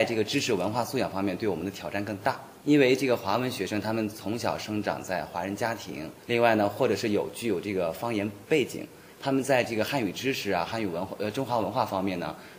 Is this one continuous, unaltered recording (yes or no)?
no